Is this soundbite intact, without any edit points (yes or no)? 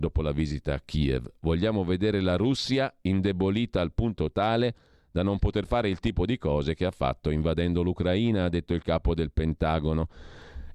yes